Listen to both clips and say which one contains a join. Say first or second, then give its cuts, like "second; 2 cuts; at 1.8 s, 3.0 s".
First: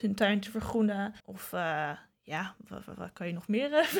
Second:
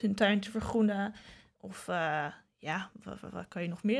first; 1 cut; at 1.2 s